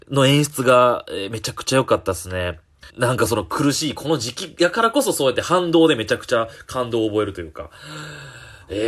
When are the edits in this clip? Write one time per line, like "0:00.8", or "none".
0:02.9